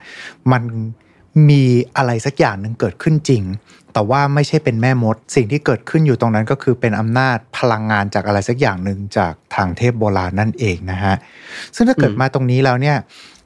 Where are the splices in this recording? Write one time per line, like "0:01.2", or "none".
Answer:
0:03.8
0:05.2